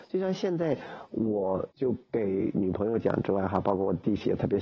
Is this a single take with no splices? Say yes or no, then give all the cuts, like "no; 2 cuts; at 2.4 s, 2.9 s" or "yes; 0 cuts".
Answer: no; 1 cut; at 1.7 s